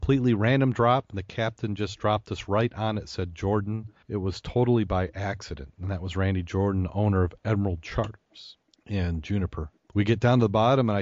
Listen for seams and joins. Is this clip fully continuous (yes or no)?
no